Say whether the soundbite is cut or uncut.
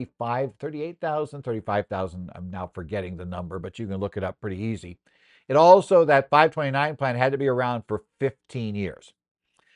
uncut